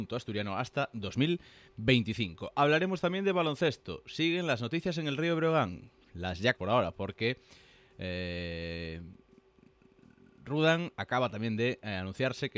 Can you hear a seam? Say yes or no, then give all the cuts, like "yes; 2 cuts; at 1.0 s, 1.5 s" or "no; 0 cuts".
yes; 1 cut; at 6.6 s